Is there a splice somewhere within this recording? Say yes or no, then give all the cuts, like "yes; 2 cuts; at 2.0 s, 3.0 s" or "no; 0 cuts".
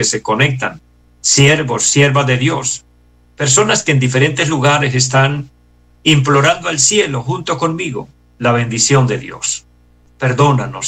no; 0 cuts